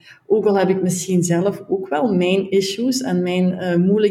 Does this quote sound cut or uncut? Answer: uncut